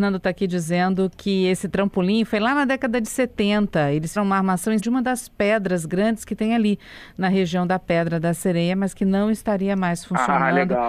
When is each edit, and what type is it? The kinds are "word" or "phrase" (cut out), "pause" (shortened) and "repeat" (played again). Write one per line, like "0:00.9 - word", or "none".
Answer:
0:04.2 - word
0:04.8 - word